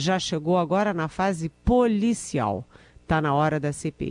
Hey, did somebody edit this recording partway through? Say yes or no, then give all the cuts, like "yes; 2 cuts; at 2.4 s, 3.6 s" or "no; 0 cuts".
no; 0 cuts